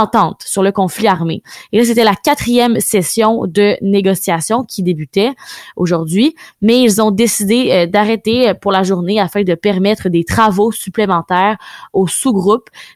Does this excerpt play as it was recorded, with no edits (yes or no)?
yes